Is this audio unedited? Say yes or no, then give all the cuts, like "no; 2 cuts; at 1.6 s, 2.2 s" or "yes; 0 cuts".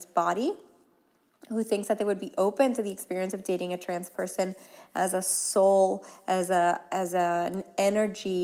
yes; 0 cuts